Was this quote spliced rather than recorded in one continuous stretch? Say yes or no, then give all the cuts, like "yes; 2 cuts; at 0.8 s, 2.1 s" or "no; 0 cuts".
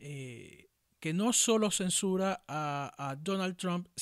no; 0 cuts